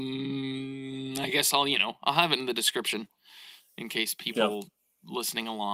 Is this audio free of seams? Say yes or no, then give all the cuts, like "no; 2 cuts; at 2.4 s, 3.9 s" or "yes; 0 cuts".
yes; 0 cuts